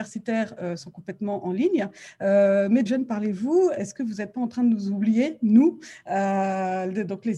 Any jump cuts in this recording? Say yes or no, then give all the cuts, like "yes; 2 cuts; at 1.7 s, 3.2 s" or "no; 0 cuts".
yes; 2 cuts; at 2.9 s, 3.8 s